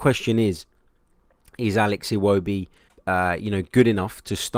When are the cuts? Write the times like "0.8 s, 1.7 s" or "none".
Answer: 2.9 s

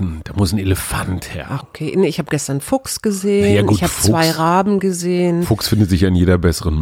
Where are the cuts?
1.6 s

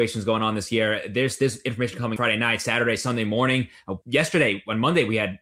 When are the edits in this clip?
2.2 s, 4.0 s

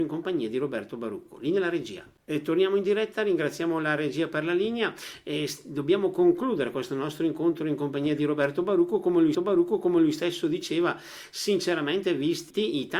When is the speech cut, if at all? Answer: 9.3 s

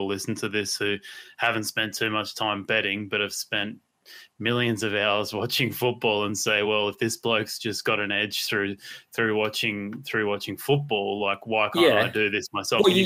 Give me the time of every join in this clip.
none

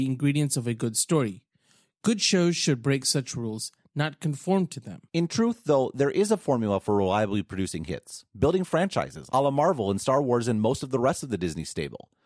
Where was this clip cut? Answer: 5.1 s

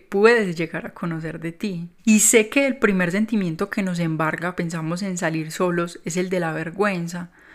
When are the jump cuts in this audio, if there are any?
2.0 s, 4.6 s

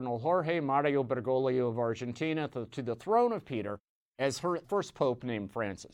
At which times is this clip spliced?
4.6 s

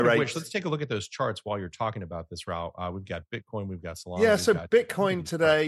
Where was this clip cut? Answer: none

